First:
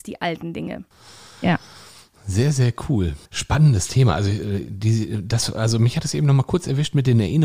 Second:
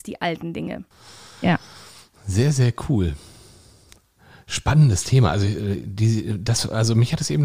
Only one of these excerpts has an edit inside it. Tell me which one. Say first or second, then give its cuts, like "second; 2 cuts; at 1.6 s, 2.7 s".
first; 1 cut; at 3.3 s